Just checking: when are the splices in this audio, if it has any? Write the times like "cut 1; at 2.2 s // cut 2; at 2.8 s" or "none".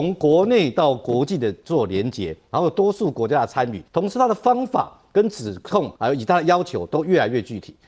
cut 1; at 3.9 s // cut 2; at 6.0 s